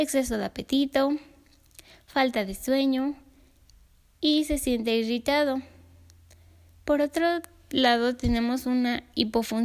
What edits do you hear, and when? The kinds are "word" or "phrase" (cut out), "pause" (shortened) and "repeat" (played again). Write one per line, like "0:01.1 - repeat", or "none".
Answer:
none